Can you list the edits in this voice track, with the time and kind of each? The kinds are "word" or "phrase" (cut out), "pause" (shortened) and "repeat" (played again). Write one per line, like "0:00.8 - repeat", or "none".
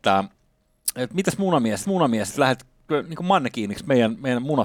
0:01.8 - repeat